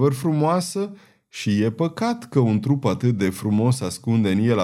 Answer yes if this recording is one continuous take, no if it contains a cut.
yes